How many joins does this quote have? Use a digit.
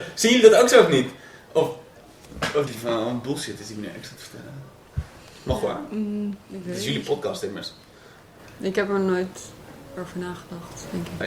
2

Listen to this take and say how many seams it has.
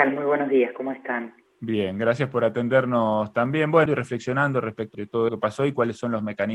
4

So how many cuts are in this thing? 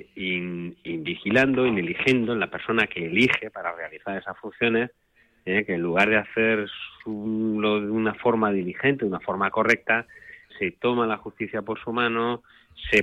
1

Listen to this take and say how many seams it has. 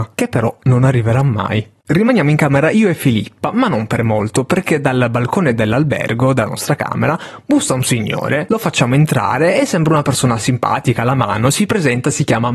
0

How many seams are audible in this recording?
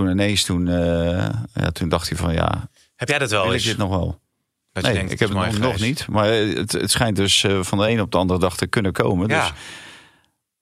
0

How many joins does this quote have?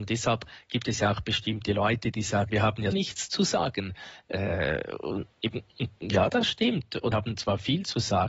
4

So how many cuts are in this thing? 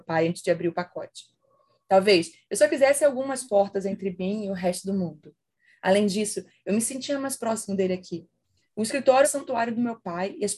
1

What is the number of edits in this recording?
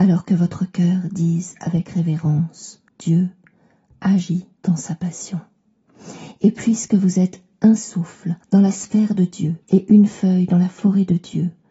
4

